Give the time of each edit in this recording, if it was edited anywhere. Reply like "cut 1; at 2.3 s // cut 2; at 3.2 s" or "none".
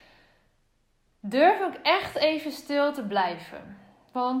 none